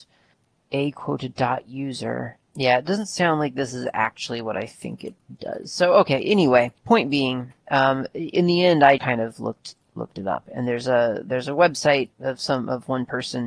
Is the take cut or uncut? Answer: cut